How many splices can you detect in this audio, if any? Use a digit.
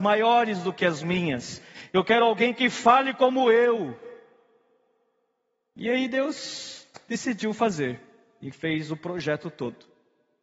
0